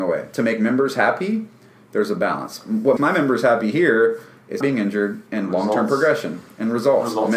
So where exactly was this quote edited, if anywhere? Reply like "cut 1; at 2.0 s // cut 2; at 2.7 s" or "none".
cut 1; at 3.0 s // cut 2; at 4.6 s